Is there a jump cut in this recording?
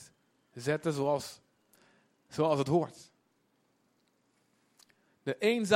no; 0 cuts

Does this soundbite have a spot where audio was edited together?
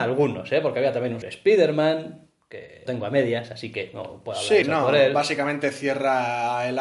yes; 3 cuts; at 1.2 s, 2.9 s, 4.6 s

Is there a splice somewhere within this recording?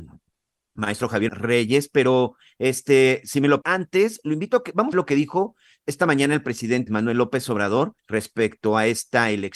yes; 5 cuts; at 1.3 s, 3.6 s, 4.9 s, 6.9 s, 8.0 s

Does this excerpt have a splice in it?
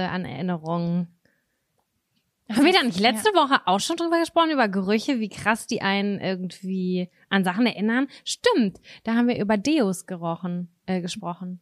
no; 0 cuts

